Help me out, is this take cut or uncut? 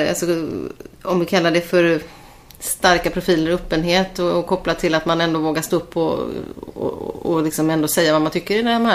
cut